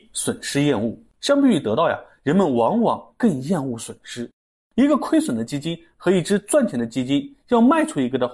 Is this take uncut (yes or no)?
yes